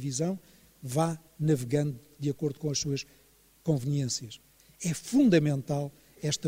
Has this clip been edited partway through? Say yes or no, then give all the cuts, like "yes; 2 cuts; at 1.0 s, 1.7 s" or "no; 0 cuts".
yes; 2 cuts; at 1.3 s, 4.6 s